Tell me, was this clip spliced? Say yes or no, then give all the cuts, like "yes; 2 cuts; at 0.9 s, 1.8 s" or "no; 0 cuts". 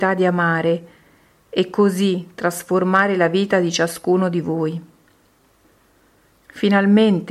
no; 0 cuts